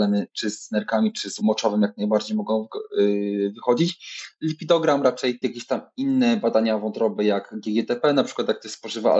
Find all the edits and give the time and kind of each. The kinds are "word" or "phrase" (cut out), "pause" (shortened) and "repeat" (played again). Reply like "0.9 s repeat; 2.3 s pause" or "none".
1.4 s word; 5.4 s word